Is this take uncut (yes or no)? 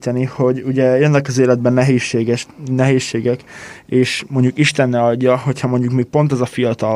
yes